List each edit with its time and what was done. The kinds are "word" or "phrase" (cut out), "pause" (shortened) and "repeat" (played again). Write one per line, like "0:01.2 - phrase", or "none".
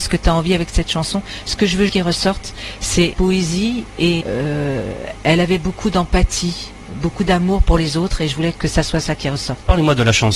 0:01.9 - word
0:03.1 - word
0:04.2 - word
0:08.5 - word